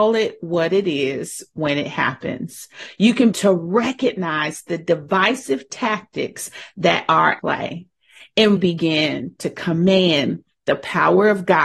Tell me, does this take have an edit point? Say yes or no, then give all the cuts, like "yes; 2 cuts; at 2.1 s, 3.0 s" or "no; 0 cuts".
yes; 3 cuts; at 3.3 s, 7.4 s, 8.6 s